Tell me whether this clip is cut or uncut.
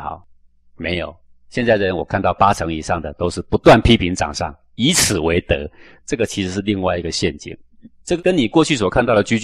uncut